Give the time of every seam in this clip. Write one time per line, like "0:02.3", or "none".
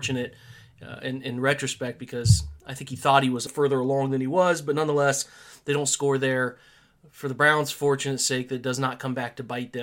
0:03.5